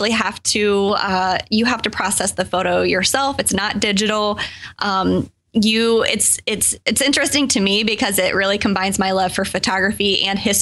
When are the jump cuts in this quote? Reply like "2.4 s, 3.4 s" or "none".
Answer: 6.8 s